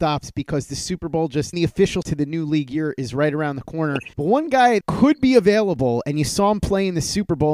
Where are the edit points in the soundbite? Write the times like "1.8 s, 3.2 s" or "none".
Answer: 1.5 s, 2.0 s, 4.1 s, 4.8 s